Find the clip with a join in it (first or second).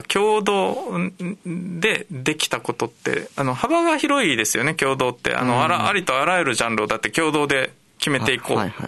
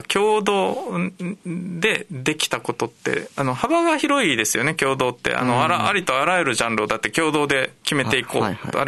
second